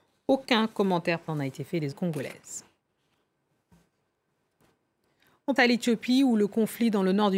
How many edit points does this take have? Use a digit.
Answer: 3